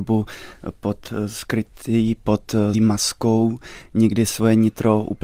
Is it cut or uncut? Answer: cut